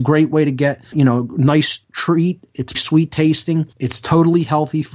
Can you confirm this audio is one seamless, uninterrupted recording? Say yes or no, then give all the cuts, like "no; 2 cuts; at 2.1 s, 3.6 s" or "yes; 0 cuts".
no; 4 cuts; at 0.9 s, 1.8 s, 2.7 s, 3.7 s